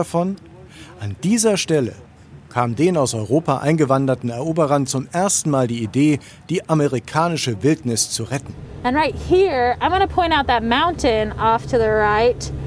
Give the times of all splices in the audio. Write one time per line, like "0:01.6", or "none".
none